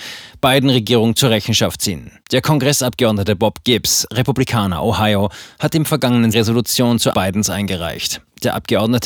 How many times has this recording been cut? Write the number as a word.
three